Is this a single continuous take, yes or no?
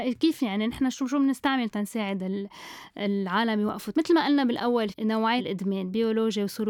no